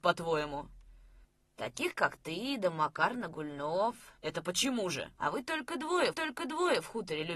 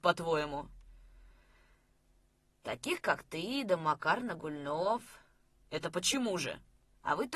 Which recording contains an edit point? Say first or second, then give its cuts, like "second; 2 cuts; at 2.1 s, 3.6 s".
first; 4 cuts; at 1.2 s, 4.2 s, 5.2 s, 6.1 s